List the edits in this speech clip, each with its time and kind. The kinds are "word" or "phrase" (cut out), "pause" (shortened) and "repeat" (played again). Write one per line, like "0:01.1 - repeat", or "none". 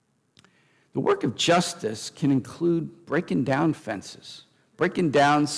none